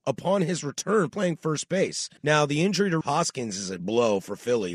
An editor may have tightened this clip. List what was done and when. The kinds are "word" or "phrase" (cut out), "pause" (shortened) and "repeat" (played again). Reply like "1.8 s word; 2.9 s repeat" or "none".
1.1 s word; 2.2 s pause; 3.0 s word; 3.8 s word